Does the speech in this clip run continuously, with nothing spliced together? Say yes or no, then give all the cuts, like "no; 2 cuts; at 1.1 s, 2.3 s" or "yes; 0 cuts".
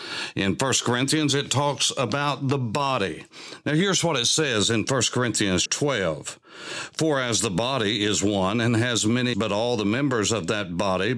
no; 2 cuts; at 5.7 s, 9.3 s